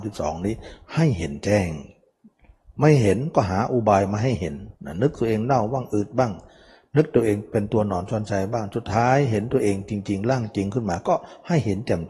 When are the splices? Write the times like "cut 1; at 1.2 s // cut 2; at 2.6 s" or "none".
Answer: cut 1; at 4.8 s